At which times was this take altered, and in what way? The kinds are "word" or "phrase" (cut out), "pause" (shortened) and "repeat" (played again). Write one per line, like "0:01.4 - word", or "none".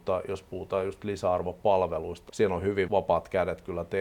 0:02.3 - word
0:02.9 - word